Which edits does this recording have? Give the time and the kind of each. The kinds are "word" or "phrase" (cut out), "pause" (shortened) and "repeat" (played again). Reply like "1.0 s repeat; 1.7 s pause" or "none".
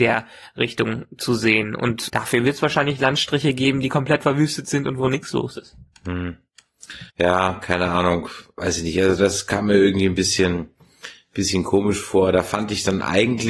2.1 s word; 7.1 s pause

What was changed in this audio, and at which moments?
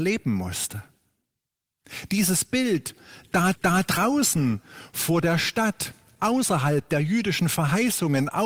3.5 s repeat

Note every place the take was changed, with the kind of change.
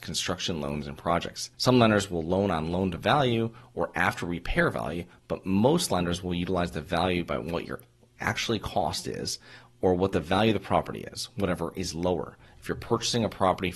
1.5 s pause

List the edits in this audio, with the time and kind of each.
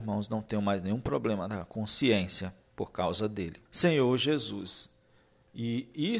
3.7 s pause

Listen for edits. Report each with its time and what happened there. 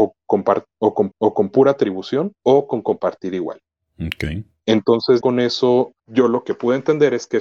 1.1 s repeat; 2.3 s pause; 3.7 s pause; 5.2 s word; 6.0 s pause

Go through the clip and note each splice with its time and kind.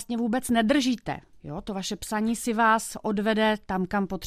none

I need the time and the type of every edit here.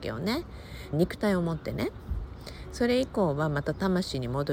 0.9 s phrase

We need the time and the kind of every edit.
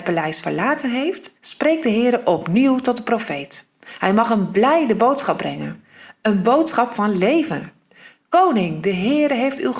1.4 s pause

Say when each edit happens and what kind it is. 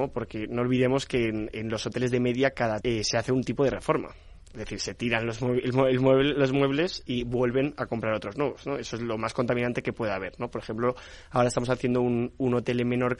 2.8 s phrase

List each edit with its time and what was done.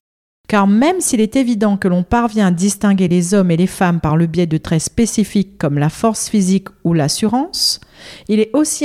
none

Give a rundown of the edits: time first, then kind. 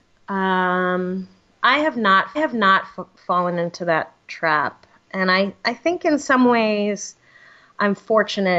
2.3 s repeat; 4.2 s pause

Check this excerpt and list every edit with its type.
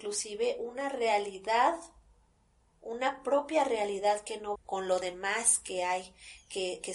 4.6 s phrase

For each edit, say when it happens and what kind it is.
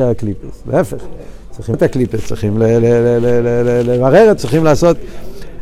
1.7 s word; 4.4 s word

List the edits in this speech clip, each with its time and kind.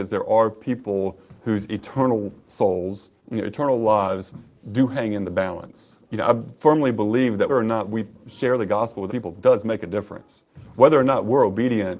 1.4 s pause; 3.2 s pause; 6.0 s pause; 7.5 s word; 9.1 s word

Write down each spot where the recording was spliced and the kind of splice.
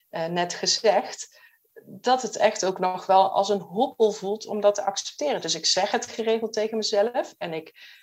none

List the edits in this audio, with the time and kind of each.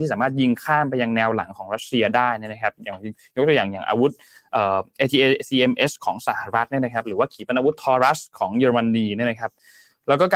none

